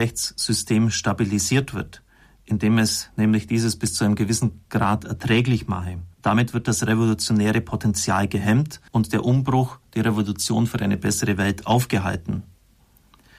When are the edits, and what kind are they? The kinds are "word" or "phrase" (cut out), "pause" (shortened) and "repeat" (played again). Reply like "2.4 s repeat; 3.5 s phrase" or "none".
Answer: 6.1 s pause; 8.9 s pause